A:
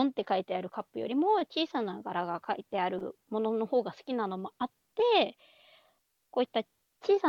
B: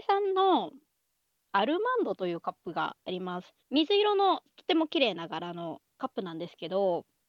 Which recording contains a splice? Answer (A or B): B